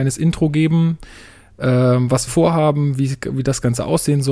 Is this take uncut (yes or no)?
no